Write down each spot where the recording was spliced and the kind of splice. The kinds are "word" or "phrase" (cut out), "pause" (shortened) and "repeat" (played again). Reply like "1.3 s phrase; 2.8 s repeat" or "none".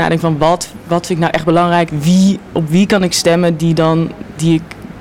1.9 s word